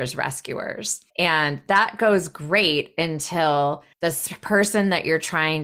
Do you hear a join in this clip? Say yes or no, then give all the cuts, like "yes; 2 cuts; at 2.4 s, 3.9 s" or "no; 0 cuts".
yes; 2 cuts; at 1.1 s, 3.9 s